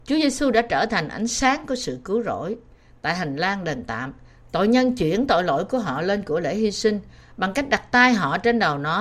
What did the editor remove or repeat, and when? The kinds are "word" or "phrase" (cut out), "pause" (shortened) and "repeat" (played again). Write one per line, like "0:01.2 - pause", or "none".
none